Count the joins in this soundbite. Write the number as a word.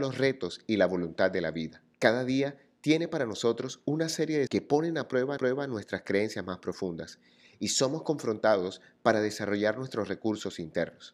three